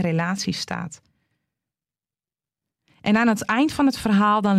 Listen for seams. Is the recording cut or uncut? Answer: uncut